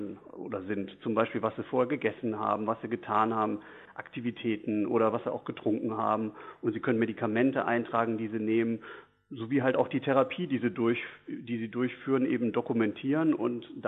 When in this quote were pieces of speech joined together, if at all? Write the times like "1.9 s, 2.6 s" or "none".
none

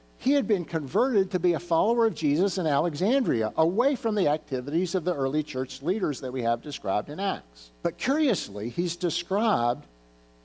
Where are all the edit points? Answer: 7.7 s

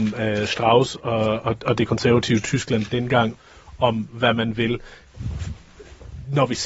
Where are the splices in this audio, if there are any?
none

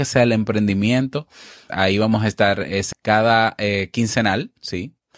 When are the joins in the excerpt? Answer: 1.7 s, 2.9 s

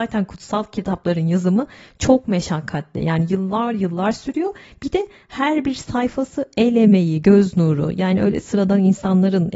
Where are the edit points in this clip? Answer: none

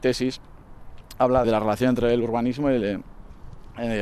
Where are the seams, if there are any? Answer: 1.4 s

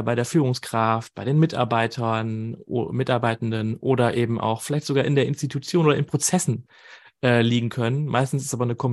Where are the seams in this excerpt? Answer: none

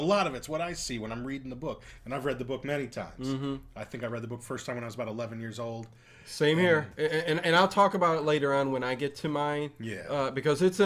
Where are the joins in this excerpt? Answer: none

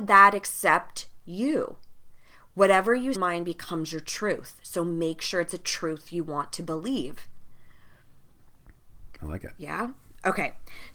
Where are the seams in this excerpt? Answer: 3.1 s

